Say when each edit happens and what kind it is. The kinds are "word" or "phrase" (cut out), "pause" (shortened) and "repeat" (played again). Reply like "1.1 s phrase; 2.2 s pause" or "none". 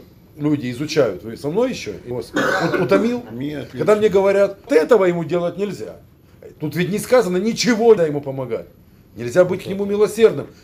2.1 s word; 4.7 s word; 8.0 s word